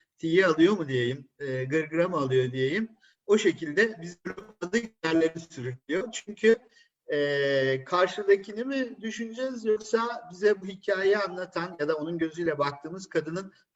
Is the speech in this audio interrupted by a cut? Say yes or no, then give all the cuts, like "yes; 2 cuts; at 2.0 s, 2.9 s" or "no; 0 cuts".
no; 0 cuts